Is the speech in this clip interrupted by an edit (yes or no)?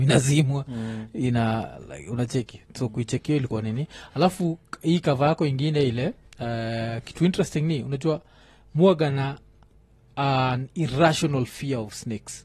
no